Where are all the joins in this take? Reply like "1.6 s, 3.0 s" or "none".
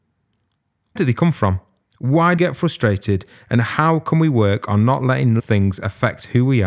1.0 s, 2.4 s, 5.4 s

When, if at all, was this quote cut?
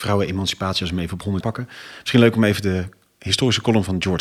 1.4 s

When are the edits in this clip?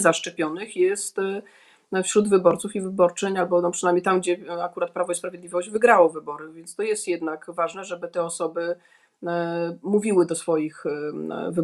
none

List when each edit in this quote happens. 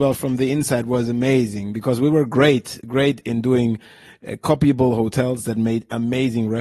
none

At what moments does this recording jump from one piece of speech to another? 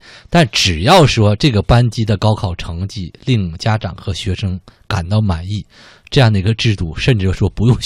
none

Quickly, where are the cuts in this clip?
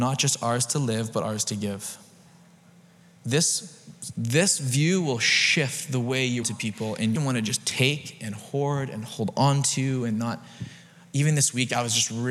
6.4 s, 7.2 s

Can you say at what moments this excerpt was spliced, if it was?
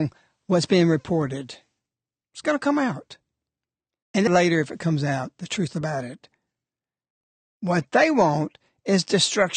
4.3 s

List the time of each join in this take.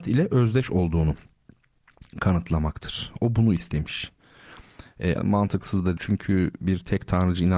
5.2 s, 6.0 s

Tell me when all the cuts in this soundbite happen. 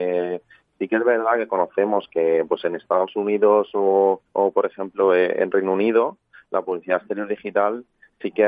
4.3 s

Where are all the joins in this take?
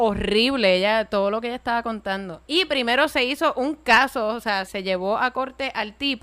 2.4 s, 4.7 s

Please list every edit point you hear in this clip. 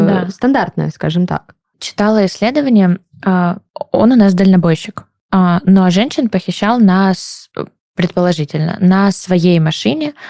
none

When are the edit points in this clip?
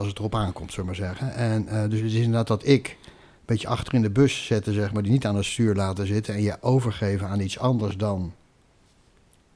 none

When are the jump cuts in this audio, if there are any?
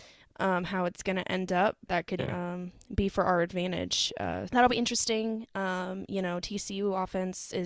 1.9 s, 2.2 s, 4.5 s

